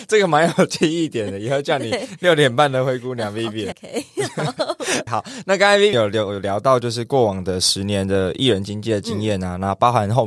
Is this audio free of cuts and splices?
no; 3 cuts; at 3.7 s, 5.1 s, 5.9 s

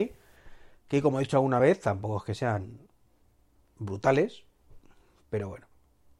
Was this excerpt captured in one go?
yes; 0 cuts

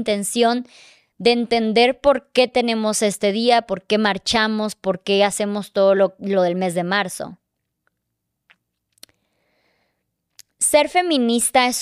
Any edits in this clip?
no; 0 cuts

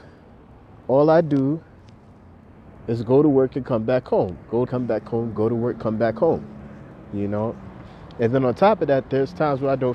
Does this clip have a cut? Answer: yes; 1 cut; at 4.7 s

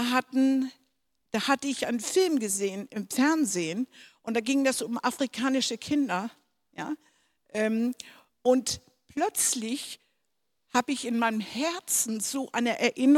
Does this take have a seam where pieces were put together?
no; 0 cuts

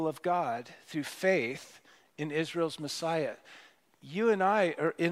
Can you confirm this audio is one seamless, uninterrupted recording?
yes; 0 cuts

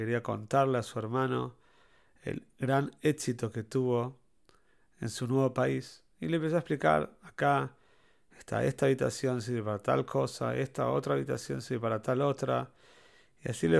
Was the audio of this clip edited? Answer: no; 0 cuts

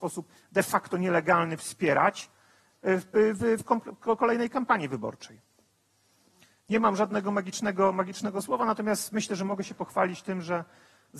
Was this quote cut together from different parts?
no; 0 cuts

